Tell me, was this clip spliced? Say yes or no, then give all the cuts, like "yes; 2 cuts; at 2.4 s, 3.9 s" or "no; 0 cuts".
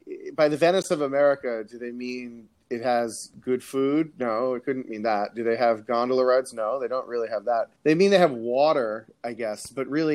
yes; 1 cut; at 7.8 s